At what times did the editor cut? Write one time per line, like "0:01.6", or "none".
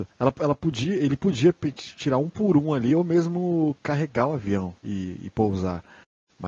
0:04.8

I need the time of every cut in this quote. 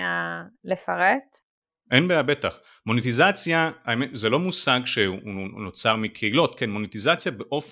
none

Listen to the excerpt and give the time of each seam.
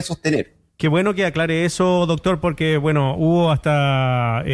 none

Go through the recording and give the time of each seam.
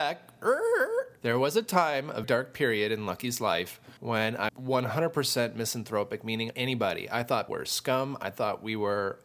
0:01.2
0:02.2
0:04.0
0:04.5
0:06.5
0:07.5

